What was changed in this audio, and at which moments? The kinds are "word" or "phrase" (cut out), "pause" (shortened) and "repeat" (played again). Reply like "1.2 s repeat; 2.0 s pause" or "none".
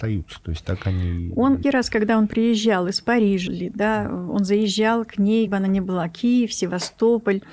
1.6 s word; 3.5 s word; 5.5 s word

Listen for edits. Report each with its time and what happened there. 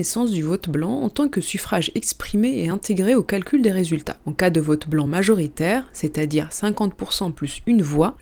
none

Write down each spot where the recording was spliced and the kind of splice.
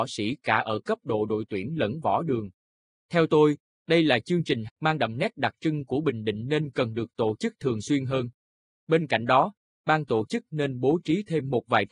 4.7 s word

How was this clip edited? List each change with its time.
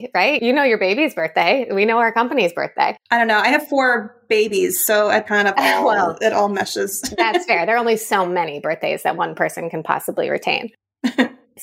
3.0 s pause; 5.3 s phrase

